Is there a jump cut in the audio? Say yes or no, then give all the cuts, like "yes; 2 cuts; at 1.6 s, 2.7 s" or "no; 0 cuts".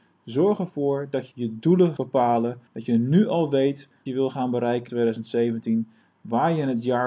yes; 5 cuts; at 1.3 s, 2.0 s, 2.7 s, 4.1 s, 4.9 s